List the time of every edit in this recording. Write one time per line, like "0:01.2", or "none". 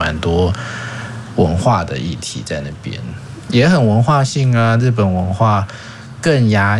0:03.5